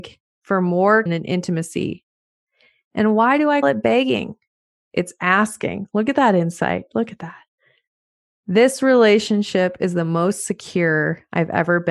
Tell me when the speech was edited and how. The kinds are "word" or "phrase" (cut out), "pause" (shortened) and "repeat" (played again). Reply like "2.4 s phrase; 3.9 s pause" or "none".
1.1 s word; 3.6 s word